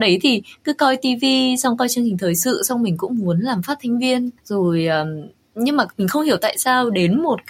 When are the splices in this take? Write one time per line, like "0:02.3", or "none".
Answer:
0:04.4